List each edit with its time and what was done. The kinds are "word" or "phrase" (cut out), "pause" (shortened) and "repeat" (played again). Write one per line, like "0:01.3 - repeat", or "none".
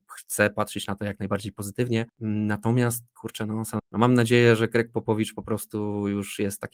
0:02.1 - pause
0:03.8 - word